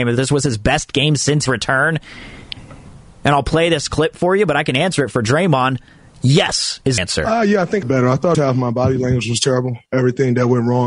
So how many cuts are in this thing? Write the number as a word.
four